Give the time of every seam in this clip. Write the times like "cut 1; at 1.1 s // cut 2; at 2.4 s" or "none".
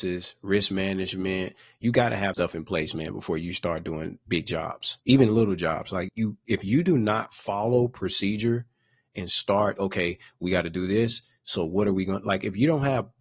cut 1; at 2.3 s // cut 2; at 5.0 s // cut 3; at 6.1 s // cut 4; at 9.8 s